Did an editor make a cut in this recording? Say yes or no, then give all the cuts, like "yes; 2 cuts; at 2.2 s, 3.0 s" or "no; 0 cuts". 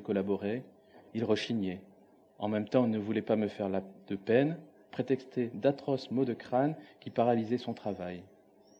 yes; 1 cut; at 1.1 s